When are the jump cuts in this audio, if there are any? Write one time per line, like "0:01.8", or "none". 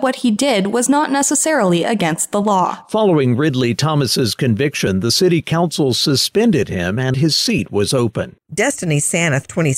0:07.1

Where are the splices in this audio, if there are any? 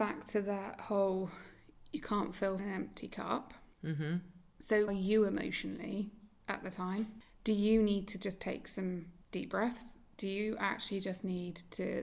0:02.6
0:03.7
0:04.9
0:09.2

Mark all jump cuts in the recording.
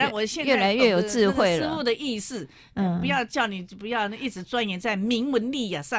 none

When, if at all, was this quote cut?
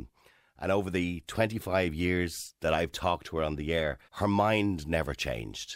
0:04.0

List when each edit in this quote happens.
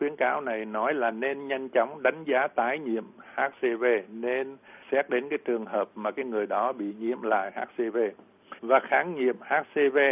0:04.8
0:08.6

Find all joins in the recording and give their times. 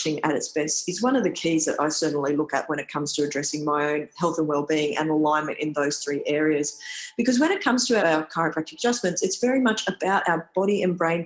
0:08.0

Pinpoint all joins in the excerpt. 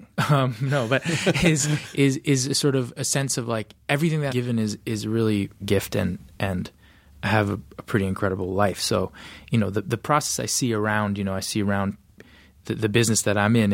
0:01.9
0:04.3
0:05.6

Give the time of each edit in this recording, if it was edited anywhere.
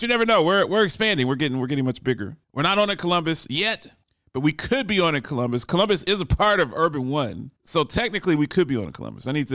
0:02.4
0:04.0
0:07.6

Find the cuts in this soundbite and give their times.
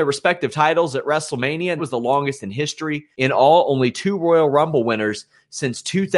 0:01.8
0:03.1

